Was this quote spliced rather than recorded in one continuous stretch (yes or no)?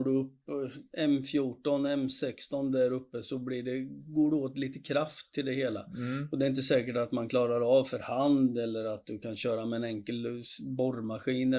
no